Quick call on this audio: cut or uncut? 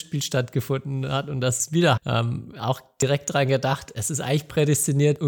cut